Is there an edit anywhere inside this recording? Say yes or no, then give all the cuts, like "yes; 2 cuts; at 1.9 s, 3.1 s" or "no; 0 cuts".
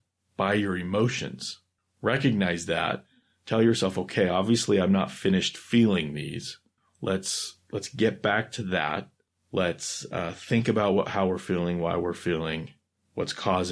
no; 0 cuts